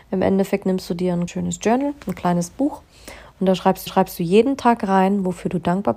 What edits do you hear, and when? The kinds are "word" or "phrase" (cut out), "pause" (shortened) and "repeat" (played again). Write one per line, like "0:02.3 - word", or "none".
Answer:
0:01.3 - word
0:03.9 - repeat